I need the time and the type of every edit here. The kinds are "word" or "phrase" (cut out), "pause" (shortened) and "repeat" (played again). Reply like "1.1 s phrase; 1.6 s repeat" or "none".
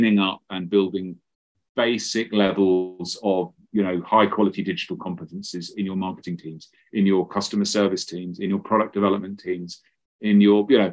none

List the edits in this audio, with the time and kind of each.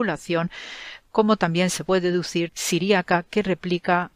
2.5 s phrase

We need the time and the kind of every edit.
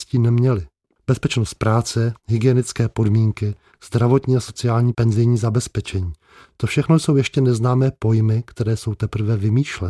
4.9 s word

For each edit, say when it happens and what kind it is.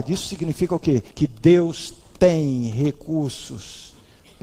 1.1 s pause

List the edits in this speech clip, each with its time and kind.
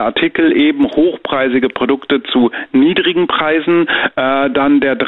none

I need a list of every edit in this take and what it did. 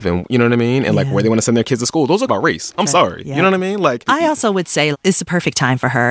2.3 s word; 4.9 s word

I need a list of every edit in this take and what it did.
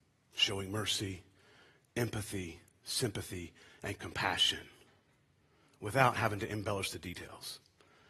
none

